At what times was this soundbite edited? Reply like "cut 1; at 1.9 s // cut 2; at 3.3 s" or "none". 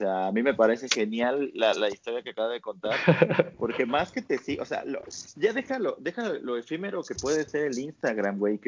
none